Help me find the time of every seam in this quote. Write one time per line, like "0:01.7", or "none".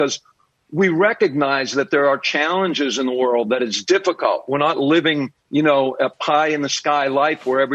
0:05.4